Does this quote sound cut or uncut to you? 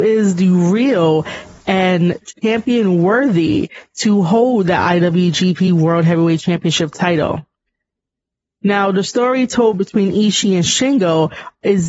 uncut